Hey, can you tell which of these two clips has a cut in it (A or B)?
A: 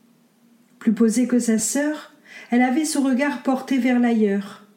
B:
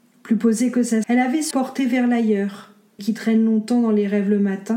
B